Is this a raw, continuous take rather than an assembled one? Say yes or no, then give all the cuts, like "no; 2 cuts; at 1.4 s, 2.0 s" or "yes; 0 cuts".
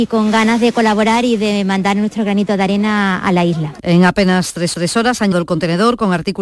no; 2 cuts; at 4.7 s, 5.3 s